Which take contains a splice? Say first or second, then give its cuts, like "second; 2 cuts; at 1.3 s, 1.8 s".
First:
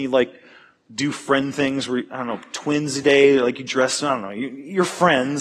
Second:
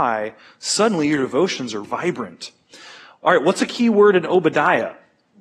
second; 1 cut; at 1.8 s